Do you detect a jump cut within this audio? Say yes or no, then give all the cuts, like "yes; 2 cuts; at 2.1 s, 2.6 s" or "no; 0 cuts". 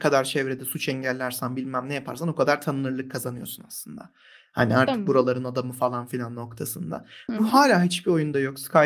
no; 0 cuts